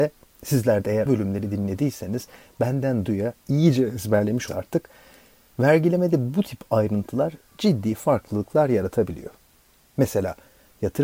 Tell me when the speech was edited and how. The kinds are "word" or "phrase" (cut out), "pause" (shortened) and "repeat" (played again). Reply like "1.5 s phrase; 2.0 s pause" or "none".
1.1 s word; 3.1 s word; 4.5 s word